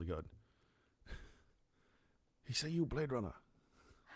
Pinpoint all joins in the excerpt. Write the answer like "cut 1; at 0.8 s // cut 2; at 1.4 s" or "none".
none